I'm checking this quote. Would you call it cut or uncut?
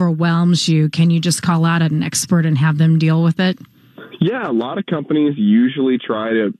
uncut